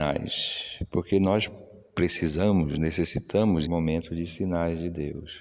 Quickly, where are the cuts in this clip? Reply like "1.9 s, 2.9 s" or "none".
3.7 s